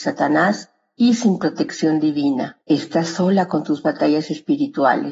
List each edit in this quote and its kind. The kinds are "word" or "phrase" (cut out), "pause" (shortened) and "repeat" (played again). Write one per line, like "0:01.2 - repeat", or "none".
0:02.6 - pause